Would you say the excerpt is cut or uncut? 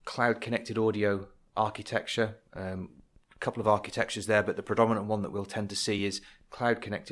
uncut